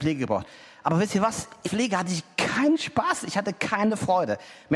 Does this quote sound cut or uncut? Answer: cut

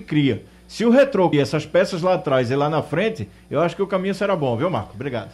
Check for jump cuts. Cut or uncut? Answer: cut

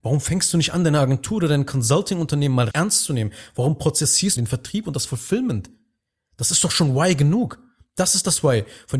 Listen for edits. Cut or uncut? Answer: cut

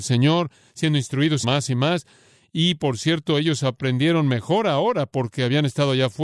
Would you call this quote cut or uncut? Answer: cut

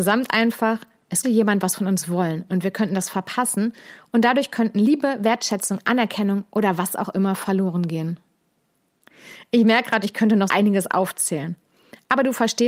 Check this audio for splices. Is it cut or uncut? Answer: cut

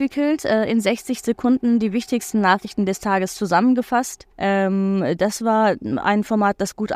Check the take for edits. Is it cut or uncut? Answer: cut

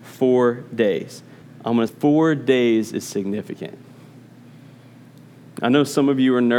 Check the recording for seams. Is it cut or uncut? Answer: cut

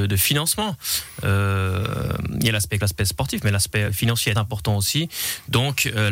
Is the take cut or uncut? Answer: cut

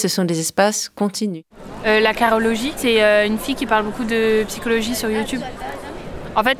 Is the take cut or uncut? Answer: uncut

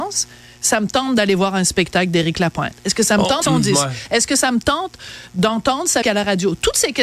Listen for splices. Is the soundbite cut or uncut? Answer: cut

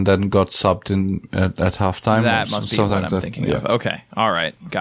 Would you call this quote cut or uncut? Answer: uncut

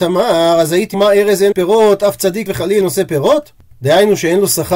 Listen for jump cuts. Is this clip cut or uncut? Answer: cut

